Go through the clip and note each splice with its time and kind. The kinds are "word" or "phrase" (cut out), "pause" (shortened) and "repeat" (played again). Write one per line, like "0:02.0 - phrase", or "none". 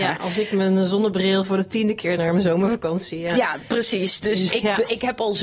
0:02.2 - word
0:04.5 - word